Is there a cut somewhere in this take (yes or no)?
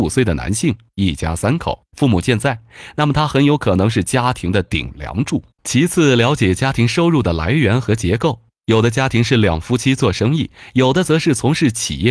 yes